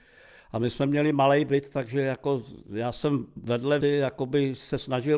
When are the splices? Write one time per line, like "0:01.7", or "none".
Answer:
0:03.8